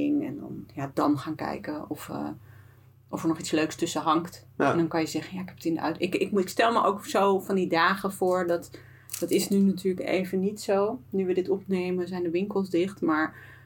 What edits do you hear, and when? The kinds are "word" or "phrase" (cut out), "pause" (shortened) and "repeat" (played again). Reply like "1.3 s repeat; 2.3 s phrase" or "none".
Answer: none